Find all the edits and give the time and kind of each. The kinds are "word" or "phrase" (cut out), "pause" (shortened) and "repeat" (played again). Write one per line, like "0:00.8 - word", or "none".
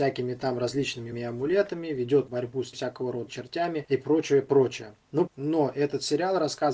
0:01.1 - word
0:02.3 - word
0:02.7 - word
0:03.3 - word
0:05.3 - phrase